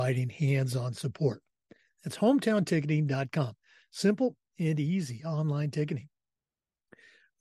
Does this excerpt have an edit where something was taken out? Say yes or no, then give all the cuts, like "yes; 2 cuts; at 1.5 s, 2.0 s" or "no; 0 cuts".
no; 0 cuts